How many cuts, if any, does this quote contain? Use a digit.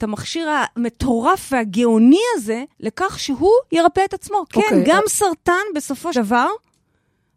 2